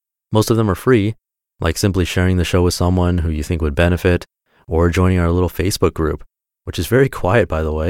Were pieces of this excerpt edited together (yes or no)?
no